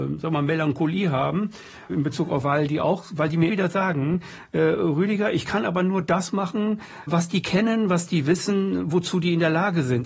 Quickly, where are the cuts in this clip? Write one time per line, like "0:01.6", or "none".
0:01.9
0:02.4
0:03.5
0:07.1